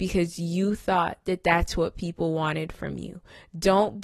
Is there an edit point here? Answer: no; 0 cuts

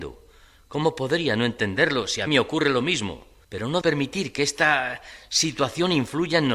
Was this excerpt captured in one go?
no; 3 cuts; at 2.3 s, 3.4 s, 3.8 s

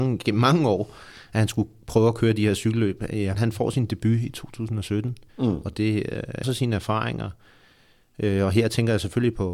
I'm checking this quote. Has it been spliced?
yes; 3 cuts; at 3.3 s, 5.3 s, 6.4 s

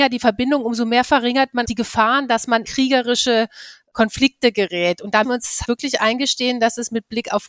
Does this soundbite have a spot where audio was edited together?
yes; 4 cuts; at 1.6 s, 2.6 s, 5.2 s, 5.6 s

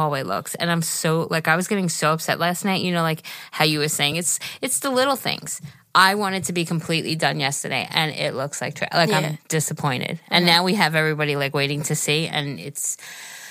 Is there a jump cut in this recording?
no; 0 cuts

